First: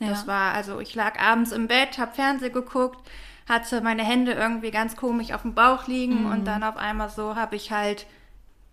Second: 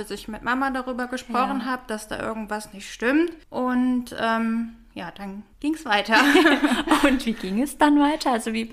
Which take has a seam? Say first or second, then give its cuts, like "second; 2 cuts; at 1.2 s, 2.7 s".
second; 2 cuts; at 3.4 s, 5.5 s